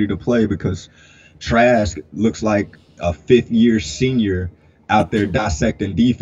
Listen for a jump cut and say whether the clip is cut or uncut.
uncut